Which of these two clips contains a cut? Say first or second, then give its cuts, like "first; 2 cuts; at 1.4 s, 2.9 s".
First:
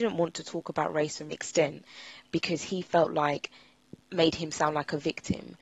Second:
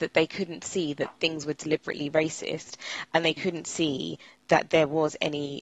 first; 2 cuts; at 1.3 s, 4.1 s